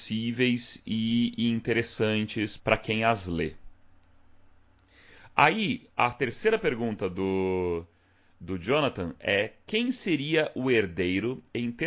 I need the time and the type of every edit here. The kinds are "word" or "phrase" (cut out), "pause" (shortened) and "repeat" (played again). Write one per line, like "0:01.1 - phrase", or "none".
0:02.6 - word